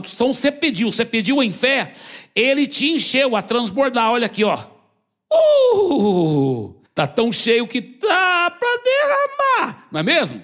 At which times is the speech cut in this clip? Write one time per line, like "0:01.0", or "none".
0:06.9